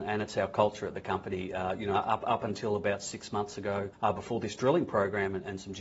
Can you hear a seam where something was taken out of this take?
yes; 1 cut; at 3.9 s

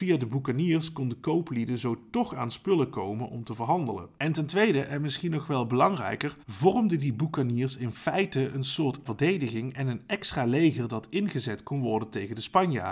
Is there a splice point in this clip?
yes; 2 cuts; at 6.4 s, 9.1 s

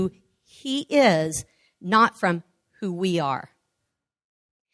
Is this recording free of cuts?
yes; 0 cuts

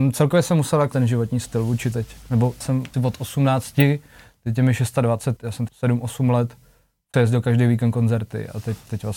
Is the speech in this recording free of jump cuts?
no; 7 cuts; at 0.9 s, 1.9 s, 2.6 s, 2.9 s, 5.4 s, 5.7 s, 7.1 s

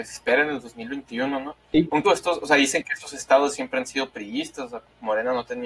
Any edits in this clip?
yes; 1 cut; at 2.0 s

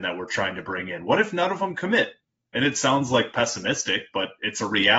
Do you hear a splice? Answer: no; 0 cuts

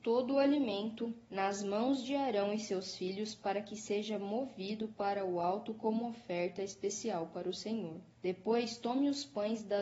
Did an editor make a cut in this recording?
yes; 2 cuts; at 1.2 s, 8.1 s

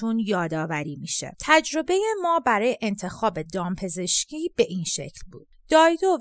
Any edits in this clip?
no; 0 cuts

